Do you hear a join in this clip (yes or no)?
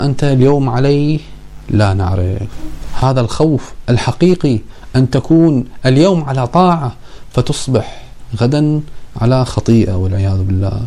no